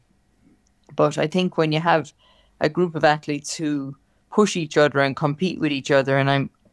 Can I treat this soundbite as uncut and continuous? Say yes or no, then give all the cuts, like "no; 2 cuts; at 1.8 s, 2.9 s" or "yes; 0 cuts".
yes; 0 cuts